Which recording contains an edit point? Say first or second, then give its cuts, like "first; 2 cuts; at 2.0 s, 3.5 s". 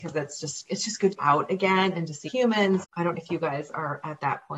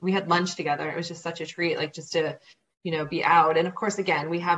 first; 4 cuts; at 1.2 s, 2.3 s, 2.8 s, 3.1 s